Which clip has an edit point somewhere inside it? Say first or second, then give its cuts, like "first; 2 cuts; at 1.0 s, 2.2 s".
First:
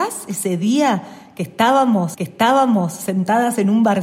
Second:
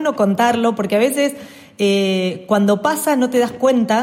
first; 1 cut; at 2.1 s